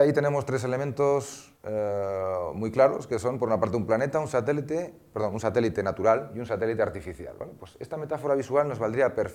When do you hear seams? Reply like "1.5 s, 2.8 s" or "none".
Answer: 1.6 s